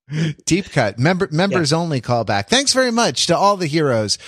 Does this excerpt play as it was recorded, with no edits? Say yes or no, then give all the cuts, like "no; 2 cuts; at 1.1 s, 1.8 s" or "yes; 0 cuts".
yes; 0 cuts